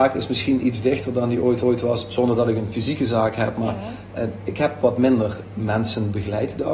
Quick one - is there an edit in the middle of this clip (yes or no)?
yes